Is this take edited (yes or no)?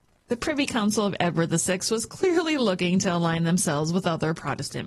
no